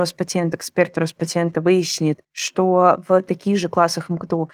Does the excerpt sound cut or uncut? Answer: cut